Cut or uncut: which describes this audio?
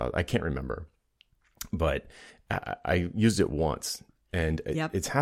uncut